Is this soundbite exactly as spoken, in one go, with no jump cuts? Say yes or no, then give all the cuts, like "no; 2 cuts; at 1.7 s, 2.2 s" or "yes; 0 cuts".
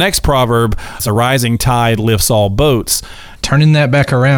yes; 0 cuts